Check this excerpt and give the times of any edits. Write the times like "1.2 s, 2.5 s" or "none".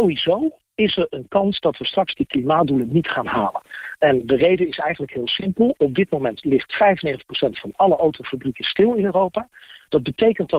none